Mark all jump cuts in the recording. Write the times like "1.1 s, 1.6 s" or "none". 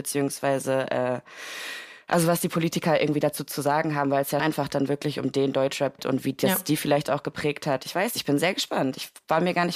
4.4 s, 6.0 s